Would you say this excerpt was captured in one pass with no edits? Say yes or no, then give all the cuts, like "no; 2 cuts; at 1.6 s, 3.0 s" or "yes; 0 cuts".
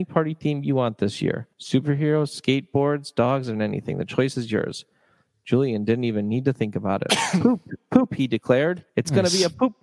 no; 2 cuts; at 1.5 s, 8.9 s